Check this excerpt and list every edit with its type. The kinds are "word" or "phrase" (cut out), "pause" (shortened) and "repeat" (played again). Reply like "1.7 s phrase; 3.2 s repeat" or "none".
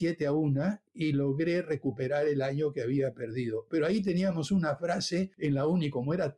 none

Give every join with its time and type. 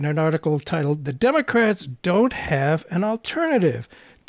none

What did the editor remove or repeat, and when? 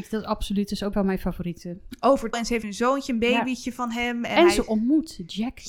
0.9 s word; 2.3 s word; 2.6 s word

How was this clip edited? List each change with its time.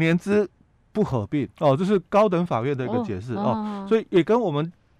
1.5 s pause

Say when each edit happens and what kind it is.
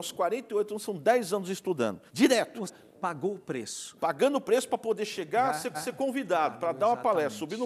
2.1 s pause; 2.7 s word; 5.7 s repeat

